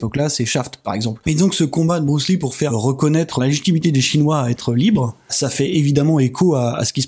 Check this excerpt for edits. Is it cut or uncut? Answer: uncut